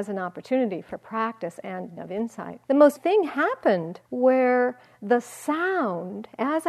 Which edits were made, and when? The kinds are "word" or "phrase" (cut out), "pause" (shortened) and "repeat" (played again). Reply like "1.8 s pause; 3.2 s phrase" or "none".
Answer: 2.0 s word; 2.6 s pause; 3.0 s word; 4.0 s pause

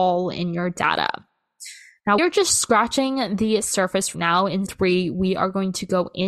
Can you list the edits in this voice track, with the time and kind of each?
2.2 s word; 4.1 s word; 4.7 s word

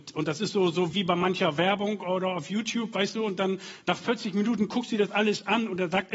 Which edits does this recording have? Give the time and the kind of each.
0.9 s word

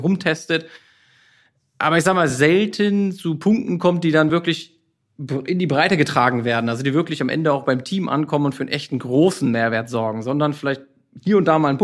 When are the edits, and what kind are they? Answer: none

